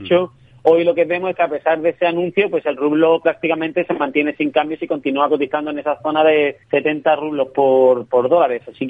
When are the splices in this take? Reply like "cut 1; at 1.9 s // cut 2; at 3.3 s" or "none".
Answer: cut 1; at 6.6 s